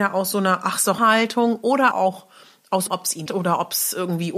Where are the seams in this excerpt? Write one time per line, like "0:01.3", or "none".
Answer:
0:01.0
0:01.9
0:02.9
0:03.3

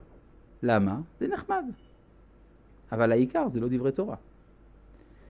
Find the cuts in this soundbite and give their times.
none

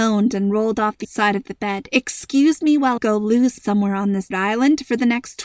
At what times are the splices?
0:01.0
0:03.0
0:03.6
0:04.3

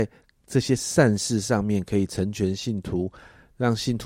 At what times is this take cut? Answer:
none

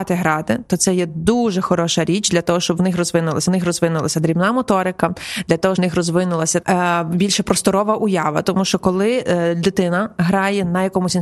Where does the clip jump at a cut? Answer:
0:03.5
0:05.8
0:06.6

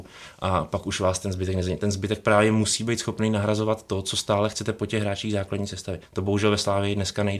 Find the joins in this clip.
0:06.1

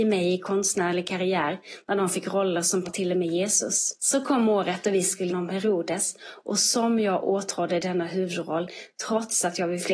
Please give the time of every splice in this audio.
0:02.8
0:04.0
0:05.3

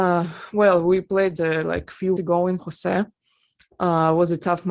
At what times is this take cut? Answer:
0:01.4
0:02.2
0:02.6

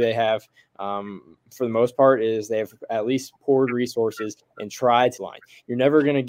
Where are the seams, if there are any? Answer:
0:05.2

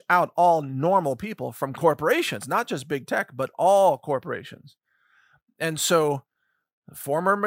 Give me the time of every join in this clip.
none

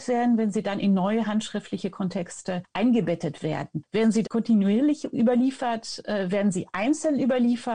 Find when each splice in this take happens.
0:04.2

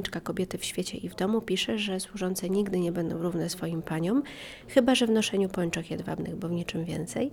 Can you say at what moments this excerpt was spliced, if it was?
none

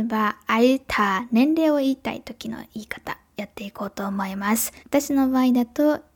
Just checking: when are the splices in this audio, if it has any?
0:04.8

